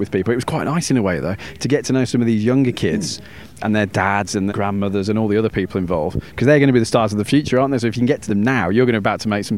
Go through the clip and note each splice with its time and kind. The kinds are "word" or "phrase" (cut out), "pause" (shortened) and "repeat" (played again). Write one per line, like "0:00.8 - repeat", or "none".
0:04.5 - word
0:08.3 - word